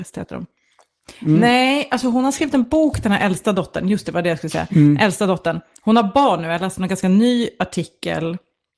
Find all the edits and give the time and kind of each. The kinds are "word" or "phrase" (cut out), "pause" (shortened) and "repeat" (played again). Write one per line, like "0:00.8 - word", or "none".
none